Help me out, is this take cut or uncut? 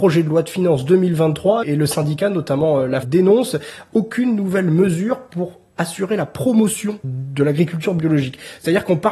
cut